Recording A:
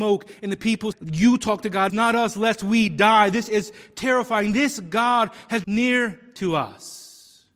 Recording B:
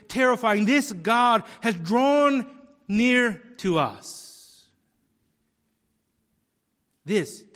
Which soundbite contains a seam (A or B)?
A